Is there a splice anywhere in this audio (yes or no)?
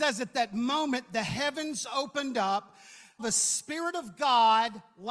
yes